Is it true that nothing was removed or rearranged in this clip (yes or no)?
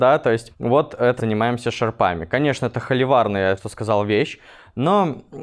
no